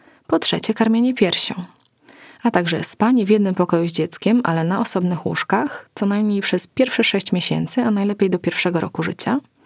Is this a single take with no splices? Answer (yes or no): yes